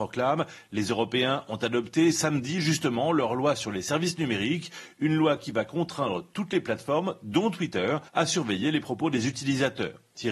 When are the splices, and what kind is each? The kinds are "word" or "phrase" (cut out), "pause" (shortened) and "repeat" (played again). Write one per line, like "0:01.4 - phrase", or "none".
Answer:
0:08.1 - pause